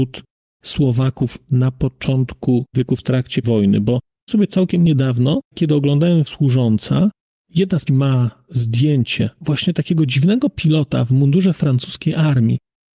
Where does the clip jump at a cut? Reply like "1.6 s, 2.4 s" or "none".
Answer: 2.7 s, 3.4 s, 4.3 s, 5.5 s, 6.3 s, 7.9 s